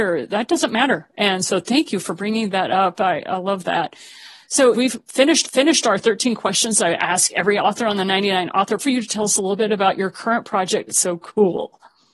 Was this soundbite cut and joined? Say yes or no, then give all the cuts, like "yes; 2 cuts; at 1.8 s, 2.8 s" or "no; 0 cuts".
yes; 4 cuts; at 4.7 s, 5.4 s, 8.8 s, 10.9 s